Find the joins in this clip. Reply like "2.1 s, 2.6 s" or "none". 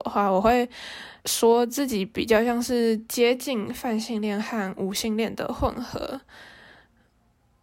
1.2 s